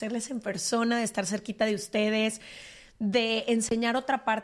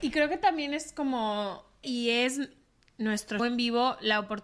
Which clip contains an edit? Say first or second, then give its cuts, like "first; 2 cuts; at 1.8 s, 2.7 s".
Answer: second; 2 cuts; at 1.8 s, 3.4 s